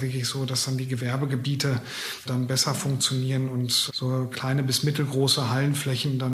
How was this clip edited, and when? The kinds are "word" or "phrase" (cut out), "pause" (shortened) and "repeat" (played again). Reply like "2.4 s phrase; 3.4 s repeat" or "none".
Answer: 2.3 s word; 3.9 s word